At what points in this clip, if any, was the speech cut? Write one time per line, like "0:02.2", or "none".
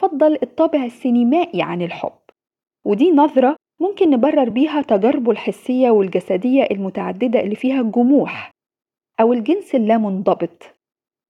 none